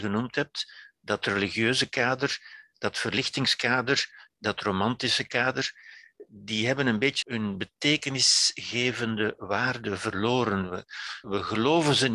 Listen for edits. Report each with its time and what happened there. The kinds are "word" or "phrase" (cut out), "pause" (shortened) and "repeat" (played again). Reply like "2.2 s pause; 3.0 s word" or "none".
7.2 s word; 11.2 s word